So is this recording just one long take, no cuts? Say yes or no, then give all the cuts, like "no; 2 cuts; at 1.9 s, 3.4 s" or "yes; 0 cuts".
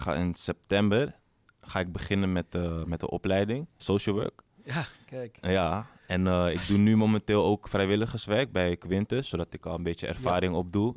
no; 1 cut; at 3.8 s